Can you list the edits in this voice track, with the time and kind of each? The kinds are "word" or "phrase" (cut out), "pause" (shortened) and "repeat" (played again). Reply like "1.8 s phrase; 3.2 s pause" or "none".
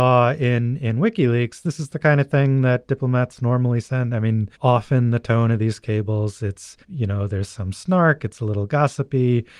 4.5 s pause; 6.8 s pause